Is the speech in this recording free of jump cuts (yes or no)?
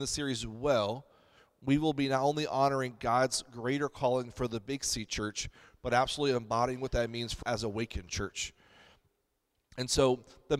no